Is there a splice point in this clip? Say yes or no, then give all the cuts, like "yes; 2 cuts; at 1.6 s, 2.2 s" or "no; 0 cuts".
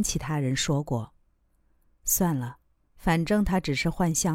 no; 0 cuts